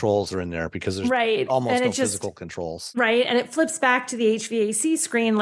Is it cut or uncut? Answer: uncut